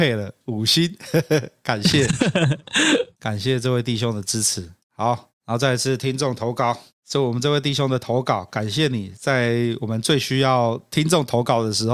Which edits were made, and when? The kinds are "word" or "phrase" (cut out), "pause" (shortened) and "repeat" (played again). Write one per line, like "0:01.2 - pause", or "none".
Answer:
0:07.0 - word

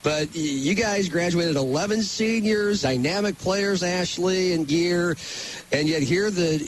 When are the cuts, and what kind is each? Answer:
0:02.8 - word
0:03.8 - phrase
0:04.7 - word

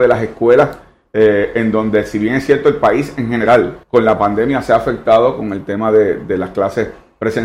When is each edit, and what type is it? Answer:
0:03.8 - pause

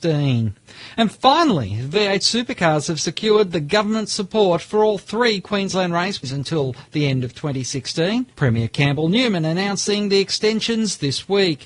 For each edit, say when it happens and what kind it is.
0:08.3 - pause

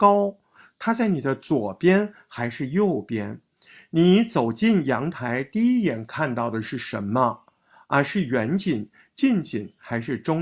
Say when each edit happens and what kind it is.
none

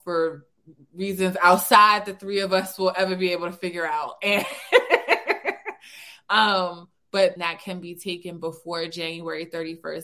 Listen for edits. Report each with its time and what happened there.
0:07.4 - phrase

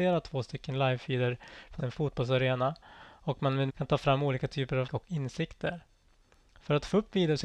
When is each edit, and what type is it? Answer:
0:01.8 - word
0:03.7 - word
0:04.9 - word

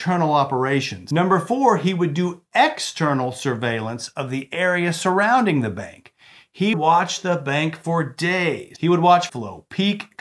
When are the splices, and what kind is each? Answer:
0:06.7 - word
0:09.3 - phrase

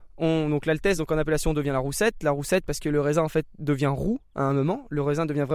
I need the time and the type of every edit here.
none

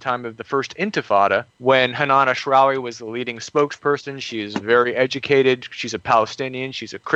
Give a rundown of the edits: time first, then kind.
0:01.5 - pause

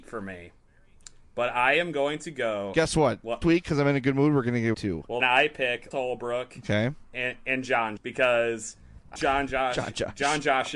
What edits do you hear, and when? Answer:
0:03.4 - word
0:04.7 - word
0:05.2 - word
0:05.9 - word
0:08.0 - word
0:09.2 - word

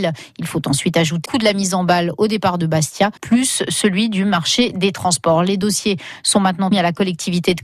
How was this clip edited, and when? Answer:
0:01.3 - word
0:03.2 - pause
0:06.7 - word

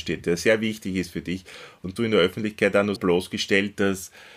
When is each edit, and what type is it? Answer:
0:02.0 - phrase
0:03.0 - word

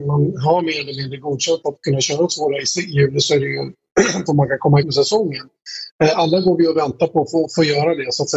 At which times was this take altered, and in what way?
0:04.3 - word
0:04.8 - word

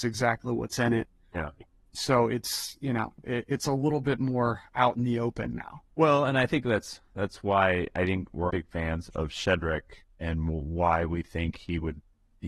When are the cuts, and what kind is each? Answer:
0:01.3 - word
0:05.9 - pause
0:08.5 - word
0:09.1 - word

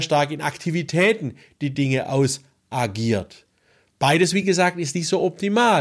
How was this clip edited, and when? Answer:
none

